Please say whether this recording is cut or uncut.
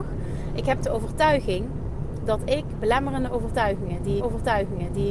cut